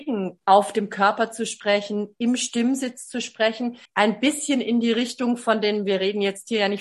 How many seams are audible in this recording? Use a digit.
1